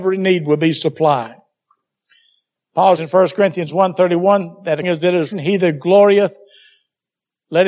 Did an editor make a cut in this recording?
yes; 3 cuts; at 3.0 s, 4.8 s, 5.3 s

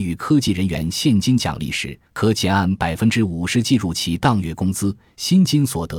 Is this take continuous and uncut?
no; 1 cut; at 2.1 s

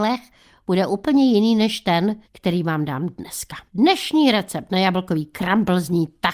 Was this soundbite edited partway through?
yes; 2 cuts; at 2.2 s, 3.7 s

